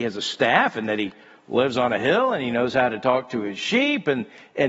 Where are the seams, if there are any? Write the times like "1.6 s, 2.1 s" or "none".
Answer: none